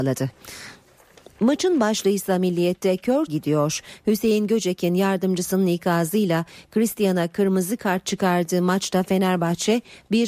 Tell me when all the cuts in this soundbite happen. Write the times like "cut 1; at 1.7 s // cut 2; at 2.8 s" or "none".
cut 1; at 3.3 s

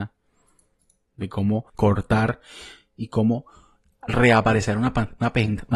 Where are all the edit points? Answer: cut 1; at 1.7 s

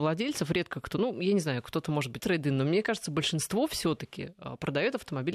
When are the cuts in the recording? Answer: cut 1; at 2.2 s

